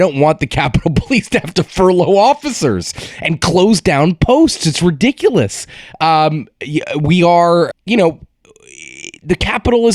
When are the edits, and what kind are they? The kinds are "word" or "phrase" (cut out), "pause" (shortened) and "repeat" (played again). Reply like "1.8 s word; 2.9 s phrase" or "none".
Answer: 7.7 s word